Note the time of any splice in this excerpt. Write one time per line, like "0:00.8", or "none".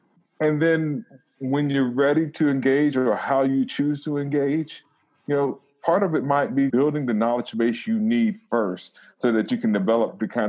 0:06.7